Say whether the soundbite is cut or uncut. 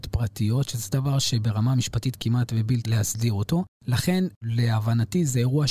cut